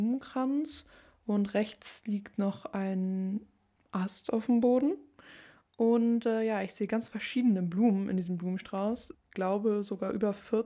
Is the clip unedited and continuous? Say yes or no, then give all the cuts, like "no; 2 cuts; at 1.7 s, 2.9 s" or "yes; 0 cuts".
yes; 0 cuts